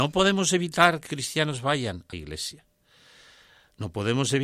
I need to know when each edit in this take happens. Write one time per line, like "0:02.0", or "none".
0:01.1
0:02.1